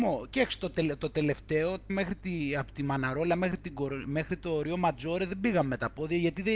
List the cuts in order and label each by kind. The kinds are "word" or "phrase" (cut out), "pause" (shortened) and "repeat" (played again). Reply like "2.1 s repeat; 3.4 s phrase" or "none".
1.9 s phrase